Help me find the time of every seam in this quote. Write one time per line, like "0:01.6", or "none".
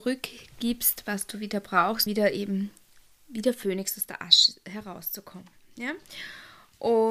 0:02.1